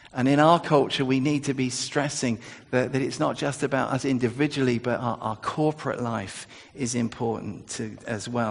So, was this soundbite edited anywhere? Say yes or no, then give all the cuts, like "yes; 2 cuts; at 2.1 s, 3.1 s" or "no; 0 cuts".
no; 0 cuts